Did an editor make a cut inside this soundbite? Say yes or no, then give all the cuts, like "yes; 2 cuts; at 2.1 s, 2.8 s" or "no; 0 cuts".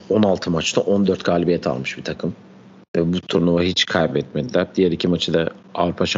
no; 0 cuts